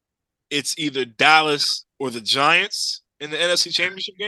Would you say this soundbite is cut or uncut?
cut